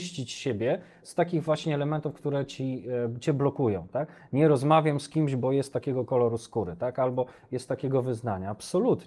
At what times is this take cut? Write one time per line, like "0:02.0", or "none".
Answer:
none

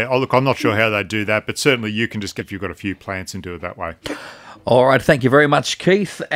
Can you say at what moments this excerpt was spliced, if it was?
0:02.4

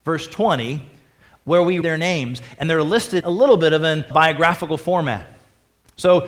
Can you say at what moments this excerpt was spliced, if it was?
0:01.8
0:03.2
0:04.1

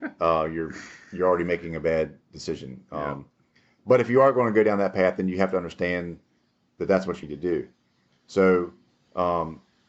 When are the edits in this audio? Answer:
0:07.2

